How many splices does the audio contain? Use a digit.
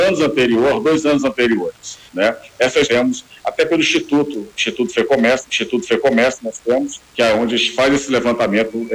4